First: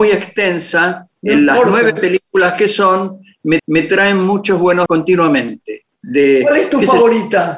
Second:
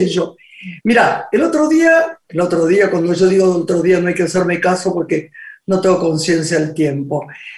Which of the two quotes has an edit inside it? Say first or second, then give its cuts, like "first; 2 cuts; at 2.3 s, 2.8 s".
first; 2 cuts; at 3.6 s, 4.9 s